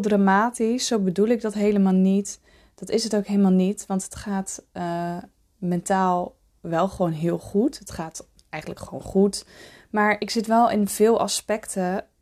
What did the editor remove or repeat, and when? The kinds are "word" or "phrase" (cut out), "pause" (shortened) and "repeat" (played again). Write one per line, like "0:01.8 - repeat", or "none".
none